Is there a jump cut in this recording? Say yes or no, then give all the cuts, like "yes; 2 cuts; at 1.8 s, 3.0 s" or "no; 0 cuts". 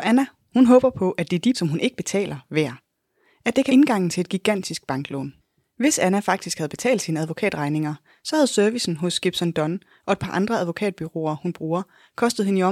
yes; 2 cuts; at 1.5 s, 3.7 s